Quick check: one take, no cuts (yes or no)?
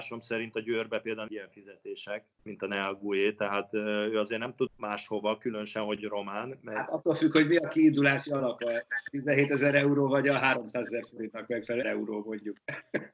no